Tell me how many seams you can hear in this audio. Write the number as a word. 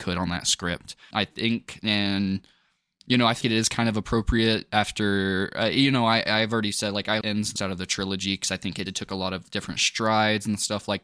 five